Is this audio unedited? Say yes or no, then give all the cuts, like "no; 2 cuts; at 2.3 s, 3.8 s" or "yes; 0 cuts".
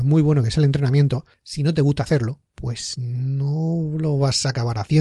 no; 1 cut; at 2.4 s